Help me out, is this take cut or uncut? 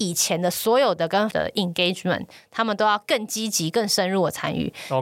cut